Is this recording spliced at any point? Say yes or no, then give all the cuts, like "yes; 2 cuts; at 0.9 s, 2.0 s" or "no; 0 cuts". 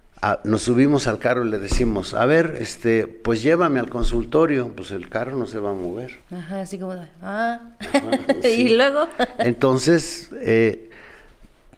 yes; 1 cut; at 6.2 s